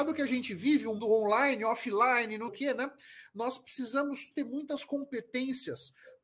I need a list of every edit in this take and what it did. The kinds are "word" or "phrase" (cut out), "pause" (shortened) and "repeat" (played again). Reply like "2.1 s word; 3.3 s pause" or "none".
1.0 s word; 2.5 s word; 4.3 s word